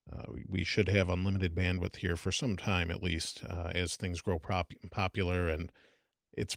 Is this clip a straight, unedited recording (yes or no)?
yes